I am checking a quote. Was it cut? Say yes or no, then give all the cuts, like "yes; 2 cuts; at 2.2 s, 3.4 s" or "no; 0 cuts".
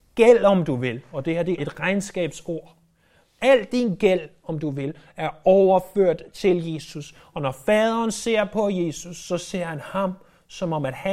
yes; 1 cut; at 1.6 s